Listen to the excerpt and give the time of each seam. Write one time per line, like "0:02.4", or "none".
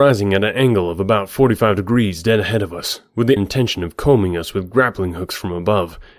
0:03.4